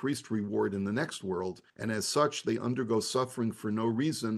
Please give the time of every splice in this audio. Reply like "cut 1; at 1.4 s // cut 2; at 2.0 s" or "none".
cut 1; at 1.7 s